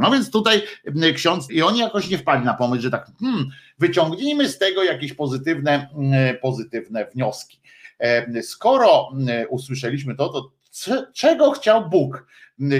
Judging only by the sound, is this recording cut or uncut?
cut